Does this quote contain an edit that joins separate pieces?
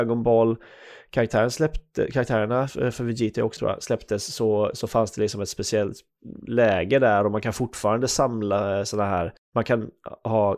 yes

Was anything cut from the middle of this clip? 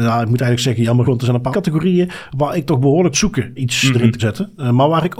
yes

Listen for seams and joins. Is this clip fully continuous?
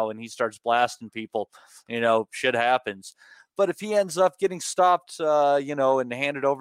yes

